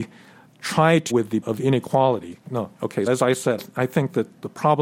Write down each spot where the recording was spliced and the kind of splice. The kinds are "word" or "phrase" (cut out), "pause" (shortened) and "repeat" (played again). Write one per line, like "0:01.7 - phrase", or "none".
0:01.1 - word
0:01.4 - word
0:03.1 - word
0:03.6 - word